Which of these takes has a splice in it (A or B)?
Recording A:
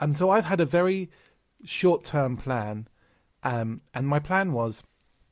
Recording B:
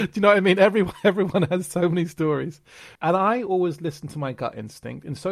B